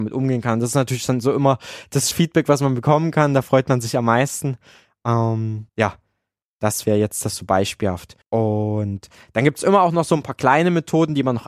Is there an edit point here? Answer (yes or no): yes